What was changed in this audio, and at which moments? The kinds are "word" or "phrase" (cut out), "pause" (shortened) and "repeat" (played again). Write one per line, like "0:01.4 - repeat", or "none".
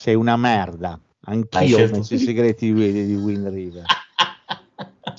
none